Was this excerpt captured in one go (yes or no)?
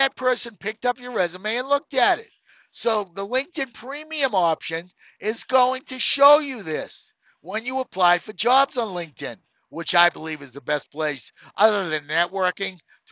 yes